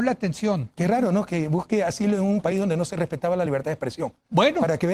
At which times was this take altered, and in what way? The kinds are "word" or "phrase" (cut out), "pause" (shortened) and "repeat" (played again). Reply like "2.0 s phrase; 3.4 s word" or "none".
none